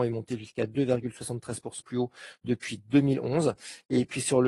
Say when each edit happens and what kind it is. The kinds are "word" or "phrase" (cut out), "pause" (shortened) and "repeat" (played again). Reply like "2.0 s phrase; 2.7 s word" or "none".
1.8 s word